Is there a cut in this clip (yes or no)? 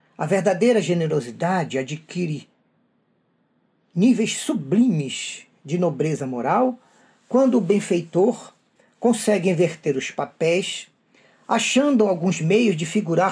no